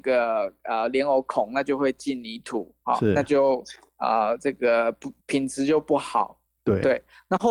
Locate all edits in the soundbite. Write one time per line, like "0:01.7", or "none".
0:05.2